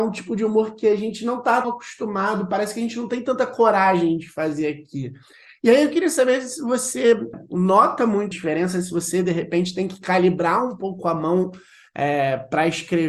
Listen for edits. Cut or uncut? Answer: cut